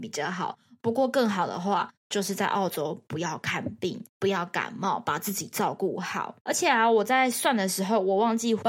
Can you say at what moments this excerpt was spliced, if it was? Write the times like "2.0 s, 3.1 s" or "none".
4.1 s, 6.4 s